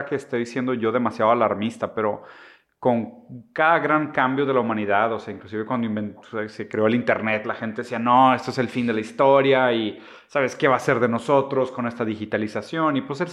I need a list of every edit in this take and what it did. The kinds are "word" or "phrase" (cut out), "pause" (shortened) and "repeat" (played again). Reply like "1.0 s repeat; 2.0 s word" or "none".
none